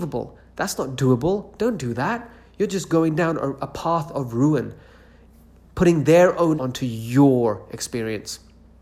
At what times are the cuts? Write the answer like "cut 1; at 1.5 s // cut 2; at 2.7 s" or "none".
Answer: cut 1; at 6.6 s